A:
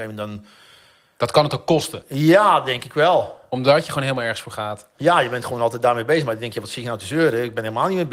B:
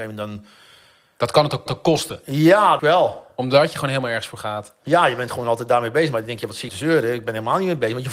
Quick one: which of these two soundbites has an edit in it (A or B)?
B